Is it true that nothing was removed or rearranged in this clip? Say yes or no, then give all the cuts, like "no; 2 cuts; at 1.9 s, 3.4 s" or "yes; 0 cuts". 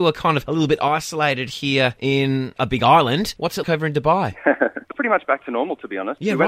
no; 2 cuts; at 3.6 s, 4.9 s